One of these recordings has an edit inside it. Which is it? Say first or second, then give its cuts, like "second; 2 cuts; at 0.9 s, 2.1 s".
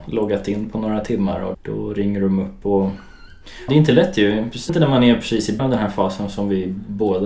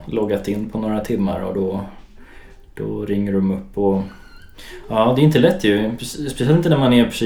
first; 4 cuts; at 1.5 s, 3.7 s, 4.7 s, 5.6 s